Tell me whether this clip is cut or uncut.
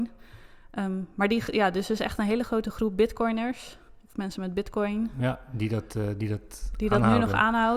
uncut